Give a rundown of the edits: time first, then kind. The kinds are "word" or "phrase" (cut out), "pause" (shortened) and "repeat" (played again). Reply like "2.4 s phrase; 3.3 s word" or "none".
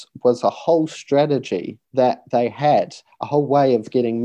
1.8 s pause